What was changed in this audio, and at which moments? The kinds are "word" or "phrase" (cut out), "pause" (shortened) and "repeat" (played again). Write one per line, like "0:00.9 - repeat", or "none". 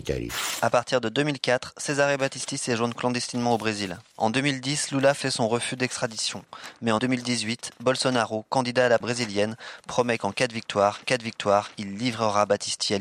0:05.2 - word
0:07.0 - word
0:09.0 - word
0:11.0 - repeat